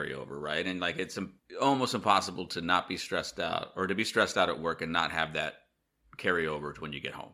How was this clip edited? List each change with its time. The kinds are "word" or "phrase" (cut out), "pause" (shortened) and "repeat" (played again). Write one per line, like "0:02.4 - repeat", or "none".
none

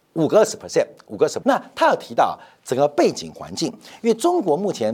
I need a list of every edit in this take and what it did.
0:01.4 - word

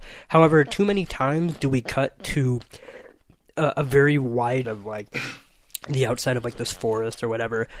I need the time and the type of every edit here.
0:04.6 - word

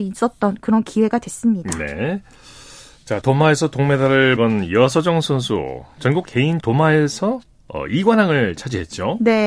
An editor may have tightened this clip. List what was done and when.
0:03.2 - word
0:04.4 - word
0:06.2 - word
0:06.6 - word

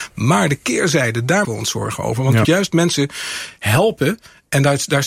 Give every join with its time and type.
0:01.4 - word
0:02.4 - word

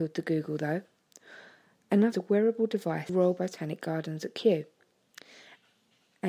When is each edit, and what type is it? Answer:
0:02.1 - phrase
0:03.1 - phrase

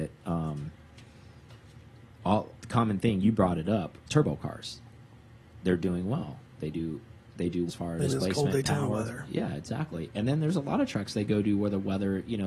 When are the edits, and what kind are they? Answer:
0:02.6 - pause
0:04.0 - pause
0:07.7 - word
0:08.0 - phrase

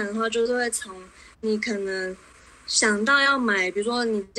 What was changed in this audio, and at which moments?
0:01.3 - pause

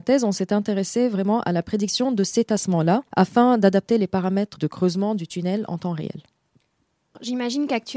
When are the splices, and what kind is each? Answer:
0:03.1 - pause

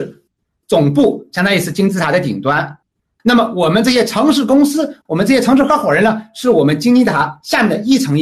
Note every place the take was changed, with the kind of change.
0:02.9 - pause
0:05.0 - pause

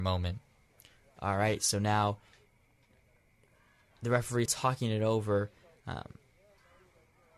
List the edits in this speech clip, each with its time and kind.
0:04.5 - word

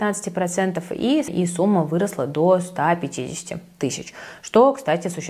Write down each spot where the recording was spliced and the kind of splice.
0:01.3 - word

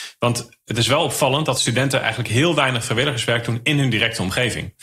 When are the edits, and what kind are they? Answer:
none

